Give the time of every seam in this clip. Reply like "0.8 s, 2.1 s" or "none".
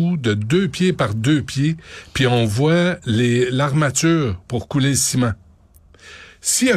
none